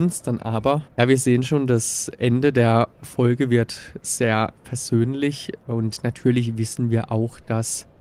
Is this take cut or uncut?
uncut